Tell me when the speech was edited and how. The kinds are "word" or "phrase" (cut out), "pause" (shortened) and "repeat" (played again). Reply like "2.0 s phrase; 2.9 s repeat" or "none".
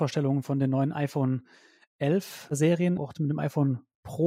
3.0 s word